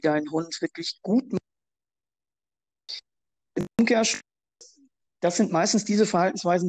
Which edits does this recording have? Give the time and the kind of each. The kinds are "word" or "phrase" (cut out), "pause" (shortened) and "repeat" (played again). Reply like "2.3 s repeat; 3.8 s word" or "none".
none